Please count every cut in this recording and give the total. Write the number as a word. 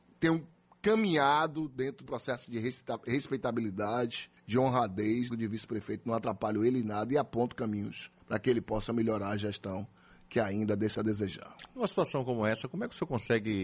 five